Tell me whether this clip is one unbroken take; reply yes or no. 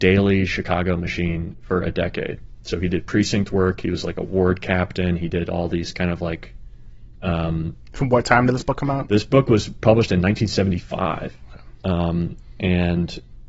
yes